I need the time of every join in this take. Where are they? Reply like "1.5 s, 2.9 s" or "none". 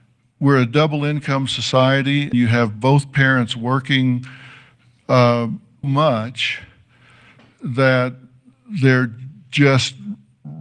2.3 s, 5.8 s

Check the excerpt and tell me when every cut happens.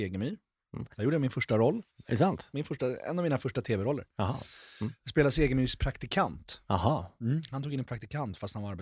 0.9 s, 1.9 s

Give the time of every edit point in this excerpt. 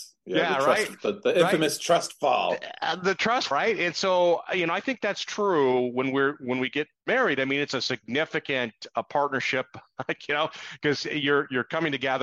3.5 s, 7.0 s

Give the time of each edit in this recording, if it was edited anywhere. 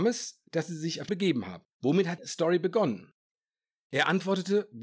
1.1 s, 1.7 s, 2.2 s

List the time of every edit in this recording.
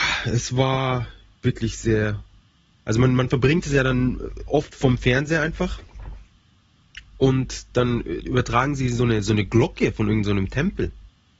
none

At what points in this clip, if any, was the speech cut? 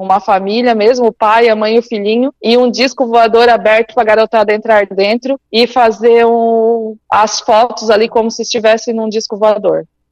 2.4 s, 5.5 s, 7.0 s

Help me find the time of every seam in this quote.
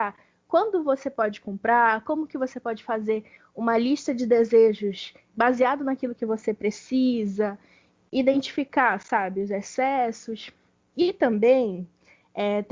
none

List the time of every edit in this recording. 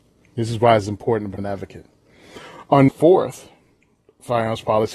1.4 s, 2.9 s

